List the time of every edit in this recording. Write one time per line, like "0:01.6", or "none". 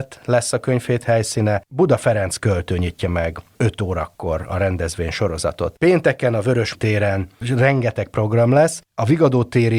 0:06.7